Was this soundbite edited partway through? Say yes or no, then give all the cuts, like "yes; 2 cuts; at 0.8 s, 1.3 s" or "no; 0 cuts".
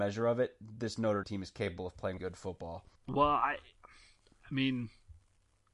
yes; 3 cuts; at 1.2 s, 2.2 s, 3.0 s